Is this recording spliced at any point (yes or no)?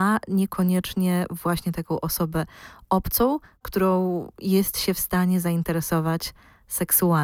no